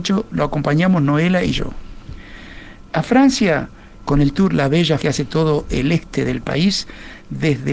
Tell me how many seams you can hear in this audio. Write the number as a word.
one